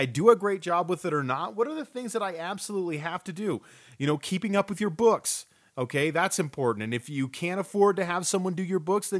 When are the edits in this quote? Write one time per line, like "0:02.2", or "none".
none